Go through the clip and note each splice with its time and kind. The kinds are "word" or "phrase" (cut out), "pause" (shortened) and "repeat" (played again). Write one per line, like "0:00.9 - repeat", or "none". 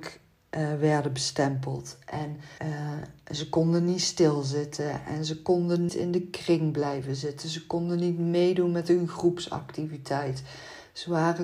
0:02.6 - pause
0:05.9 - word